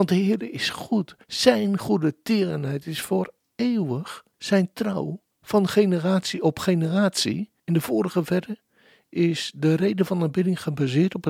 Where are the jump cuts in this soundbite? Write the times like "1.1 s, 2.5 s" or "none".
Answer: 1.2 s, 4.3 s, 5.3 s, 7.6 s

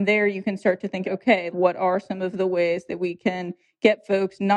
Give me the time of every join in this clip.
1.0 s, 1.5 s

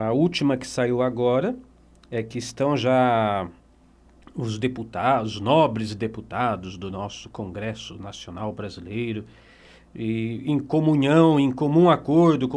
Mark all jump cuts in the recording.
none

